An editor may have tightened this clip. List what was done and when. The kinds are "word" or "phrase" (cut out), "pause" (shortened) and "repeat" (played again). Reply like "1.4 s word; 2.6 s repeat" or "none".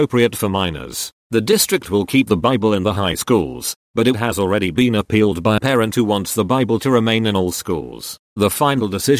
5.6 s word